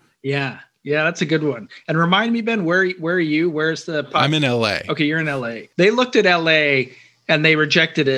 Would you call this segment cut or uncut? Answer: cut